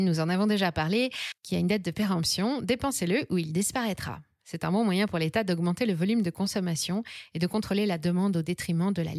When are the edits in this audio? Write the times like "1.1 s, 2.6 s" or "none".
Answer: 1.4 s